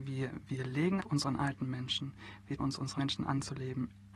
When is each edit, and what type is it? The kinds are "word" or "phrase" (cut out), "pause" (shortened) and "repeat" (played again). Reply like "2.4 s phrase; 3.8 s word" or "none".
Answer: 1.0 s word; 2.6 s word; 3.0 s word